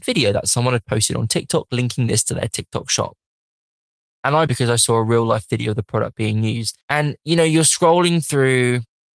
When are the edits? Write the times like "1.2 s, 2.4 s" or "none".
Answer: 4.5 s, 6.8 s